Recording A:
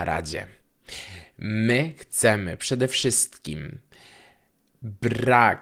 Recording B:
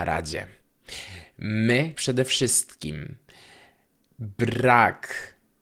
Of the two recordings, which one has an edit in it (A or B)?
B